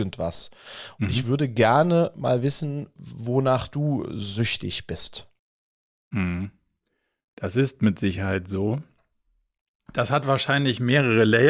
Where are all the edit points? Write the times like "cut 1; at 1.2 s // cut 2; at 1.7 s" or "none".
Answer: cut 1; at 3.0 s